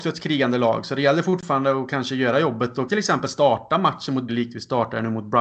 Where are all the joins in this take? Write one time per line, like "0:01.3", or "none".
0:02.9
0:04.3